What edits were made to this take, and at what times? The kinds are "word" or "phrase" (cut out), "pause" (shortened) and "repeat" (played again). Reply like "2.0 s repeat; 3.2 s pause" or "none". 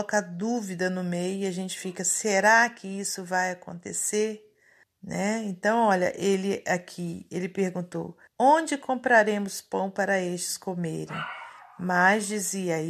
4.8 s pause; 8.3 s pause